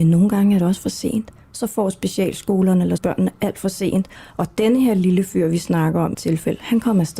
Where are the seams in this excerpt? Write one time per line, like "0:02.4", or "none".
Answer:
0:01.4
0:03.0
0:04.2
0:06.1